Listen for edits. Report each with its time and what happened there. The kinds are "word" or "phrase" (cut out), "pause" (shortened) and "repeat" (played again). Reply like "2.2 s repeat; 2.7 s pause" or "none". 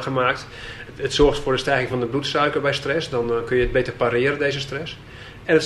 none

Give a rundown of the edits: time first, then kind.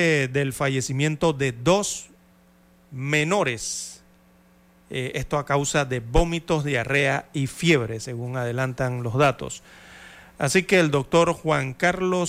none

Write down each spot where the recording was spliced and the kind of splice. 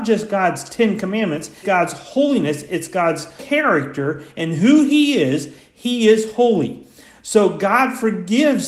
1.6 s word; 3.4 s word

